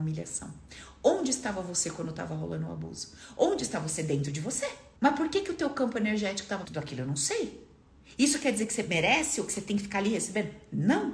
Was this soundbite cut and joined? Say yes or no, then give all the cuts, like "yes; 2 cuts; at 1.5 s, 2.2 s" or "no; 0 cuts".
yes; 2 cuts; at 5.0 s, 6.6 s